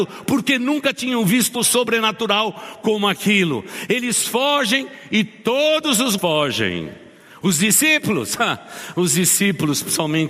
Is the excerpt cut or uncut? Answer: cut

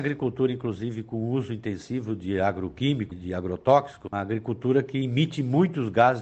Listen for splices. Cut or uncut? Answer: cut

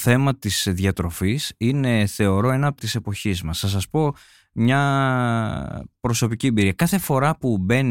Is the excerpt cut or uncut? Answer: cut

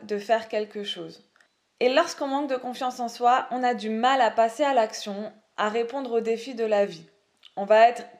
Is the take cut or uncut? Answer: cut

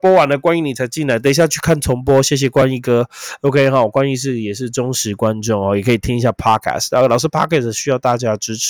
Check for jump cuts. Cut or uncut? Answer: uncut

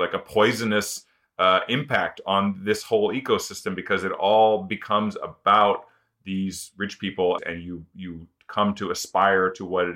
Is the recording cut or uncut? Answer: cut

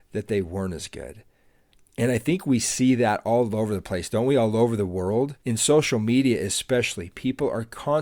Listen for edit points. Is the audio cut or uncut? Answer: cut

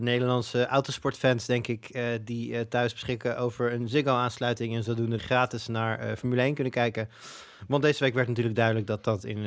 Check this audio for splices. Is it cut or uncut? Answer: cut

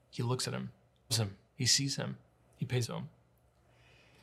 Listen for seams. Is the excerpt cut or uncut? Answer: cut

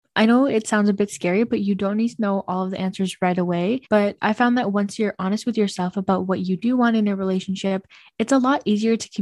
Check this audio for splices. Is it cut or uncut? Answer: cut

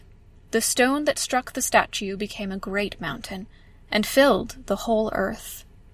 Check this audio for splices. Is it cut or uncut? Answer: uncut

